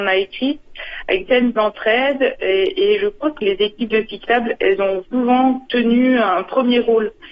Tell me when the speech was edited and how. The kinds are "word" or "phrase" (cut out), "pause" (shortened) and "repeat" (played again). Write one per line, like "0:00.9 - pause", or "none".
0:01.3 - word
0:05.0 - word